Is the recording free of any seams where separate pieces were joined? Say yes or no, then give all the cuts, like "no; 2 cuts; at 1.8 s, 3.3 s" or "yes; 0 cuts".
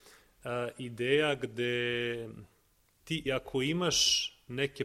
no; 1 cut; at 3.3 s